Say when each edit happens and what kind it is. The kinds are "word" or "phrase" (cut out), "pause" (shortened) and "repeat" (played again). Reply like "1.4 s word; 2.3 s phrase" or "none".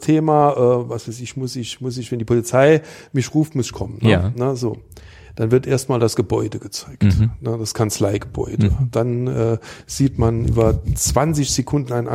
none